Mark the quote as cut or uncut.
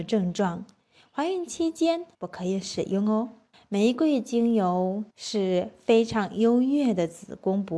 cut